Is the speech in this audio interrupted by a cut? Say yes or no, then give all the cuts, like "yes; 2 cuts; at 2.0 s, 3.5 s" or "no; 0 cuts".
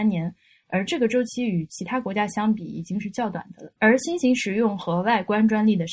yes; 1 cut; at 3.8 s